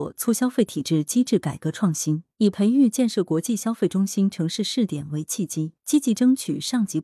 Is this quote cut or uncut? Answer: cut